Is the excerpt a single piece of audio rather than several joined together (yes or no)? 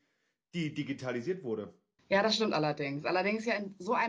no